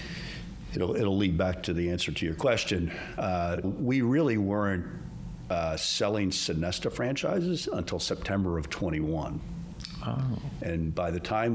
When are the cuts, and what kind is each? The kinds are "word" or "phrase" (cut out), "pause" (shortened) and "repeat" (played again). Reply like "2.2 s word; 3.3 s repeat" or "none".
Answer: 3.6 s word